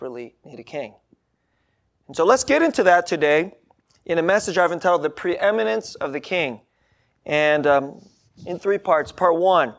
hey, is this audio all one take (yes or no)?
yes